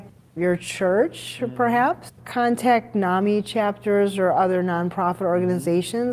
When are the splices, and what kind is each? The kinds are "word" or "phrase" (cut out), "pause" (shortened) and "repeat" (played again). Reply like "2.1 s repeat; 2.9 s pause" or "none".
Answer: none

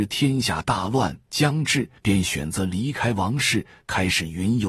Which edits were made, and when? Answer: 2.0 s pause

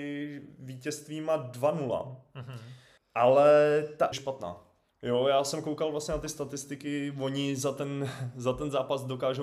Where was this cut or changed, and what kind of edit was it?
3.0 s pause; 4.1 s phrase

